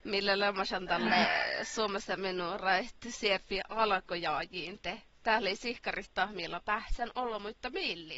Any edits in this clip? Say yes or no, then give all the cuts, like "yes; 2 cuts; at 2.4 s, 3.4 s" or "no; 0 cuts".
no; 0 cuts